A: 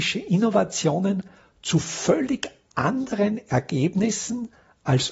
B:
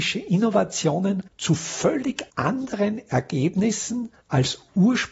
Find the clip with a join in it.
B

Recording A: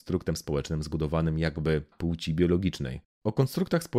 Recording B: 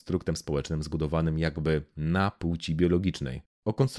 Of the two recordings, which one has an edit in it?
A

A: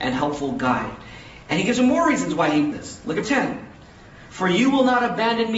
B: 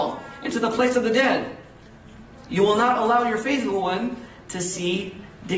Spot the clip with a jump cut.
A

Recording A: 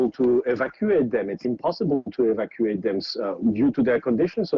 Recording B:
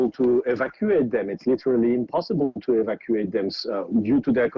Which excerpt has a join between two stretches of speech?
A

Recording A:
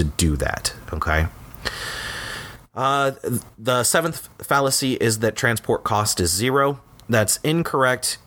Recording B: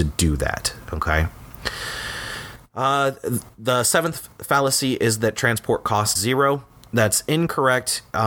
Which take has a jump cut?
B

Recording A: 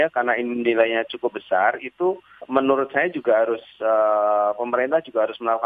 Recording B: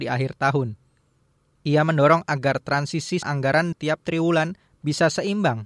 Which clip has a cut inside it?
B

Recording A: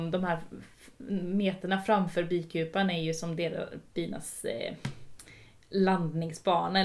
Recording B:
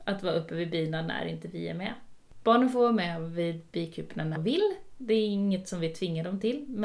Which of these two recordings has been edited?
B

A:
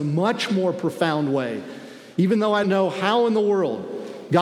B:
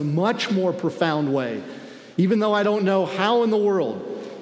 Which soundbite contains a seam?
A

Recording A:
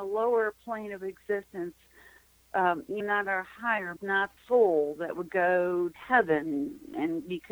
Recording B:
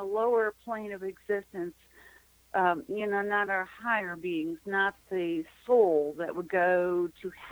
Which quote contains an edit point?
A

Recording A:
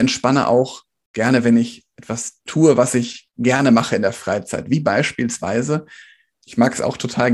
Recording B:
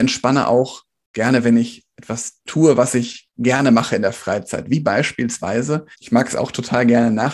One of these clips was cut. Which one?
B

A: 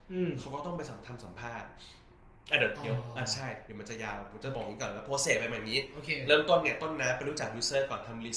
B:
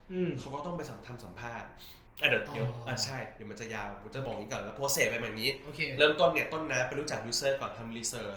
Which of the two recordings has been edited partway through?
B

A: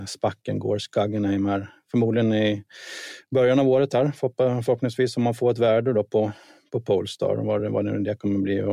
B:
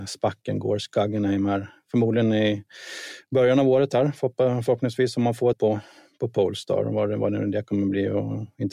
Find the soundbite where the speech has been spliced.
B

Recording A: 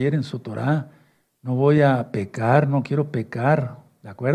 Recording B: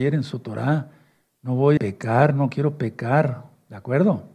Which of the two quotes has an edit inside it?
B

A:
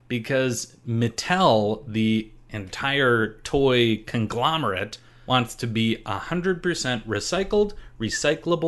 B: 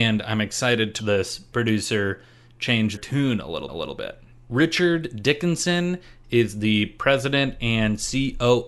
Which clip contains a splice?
B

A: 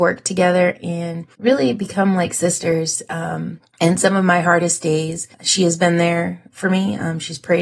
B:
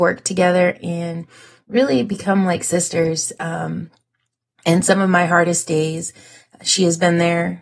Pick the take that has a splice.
A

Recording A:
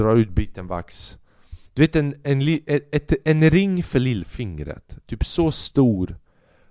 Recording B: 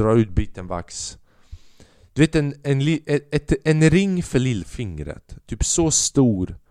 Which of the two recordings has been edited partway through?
A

